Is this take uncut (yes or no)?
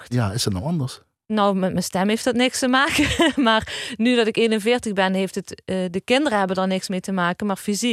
yes